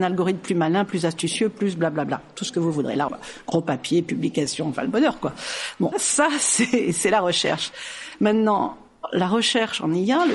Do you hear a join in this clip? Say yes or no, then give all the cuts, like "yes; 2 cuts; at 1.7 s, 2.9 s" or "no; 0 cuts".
yes; 2 cuts; at 3.1 s, 5.9 s